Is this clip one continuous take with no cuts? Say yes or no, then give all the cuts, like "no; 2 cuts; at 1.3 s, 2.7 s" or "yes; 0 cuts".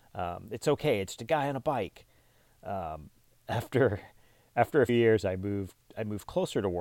no; 2 cuts; at 1.2 s, 4.9 s